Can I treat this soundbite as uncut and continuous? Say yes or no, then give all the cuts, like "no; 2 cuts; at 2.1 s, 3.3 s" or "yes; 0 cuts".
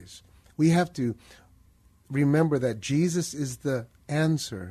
yes; 0 cuts